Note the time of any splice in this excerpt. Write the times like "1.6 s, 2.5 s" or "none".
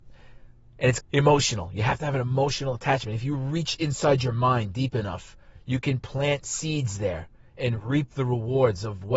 1.0 s